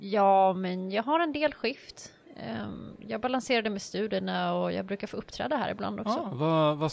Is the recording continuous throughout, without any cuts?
yes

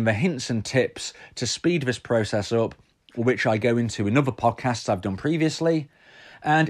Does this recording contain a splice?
no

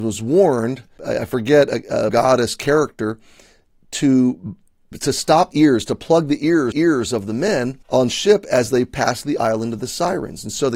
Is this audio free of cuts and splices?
no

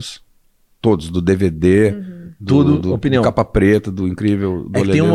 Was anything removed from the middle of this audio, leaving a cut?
no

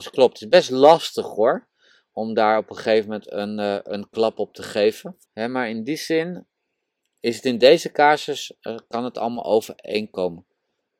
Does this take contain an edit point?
yes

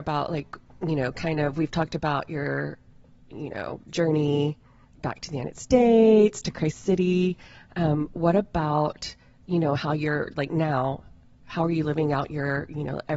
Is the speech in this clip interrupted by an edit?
no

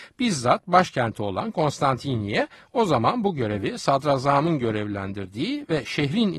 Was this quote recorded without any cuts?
yes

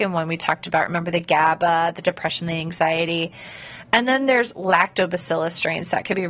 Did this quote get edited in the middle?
yes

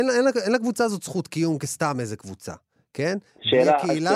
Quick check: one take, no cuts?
yes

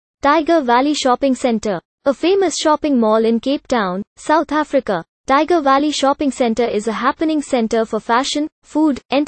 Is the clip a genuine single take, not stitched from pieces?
yes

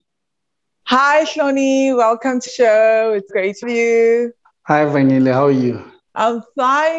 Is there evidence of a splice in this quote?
yes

